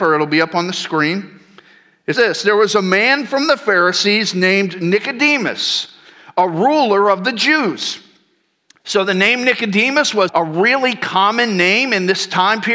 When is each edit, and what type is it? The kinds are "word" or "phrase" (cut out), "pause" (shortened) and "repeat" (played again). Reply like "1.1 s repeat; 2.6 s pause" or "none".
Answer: 2.1 s word; 10.3 s word